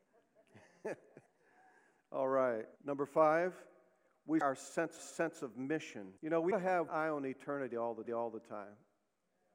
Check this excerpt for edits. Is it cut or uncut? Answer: cut